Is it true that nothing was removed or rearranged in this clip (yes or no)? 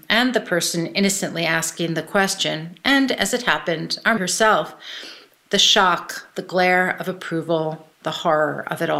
no